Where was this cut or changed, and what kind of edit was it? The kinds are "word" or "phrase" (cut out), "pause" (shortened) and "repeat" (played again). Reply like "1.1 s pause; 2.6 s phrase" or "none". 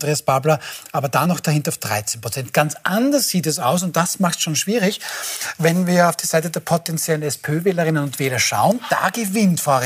none